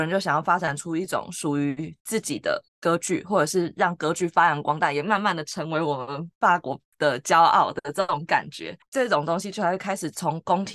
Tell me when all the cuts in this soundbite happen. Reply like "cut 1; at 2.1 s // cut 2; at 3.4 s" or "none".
cut 1; at 2.7 s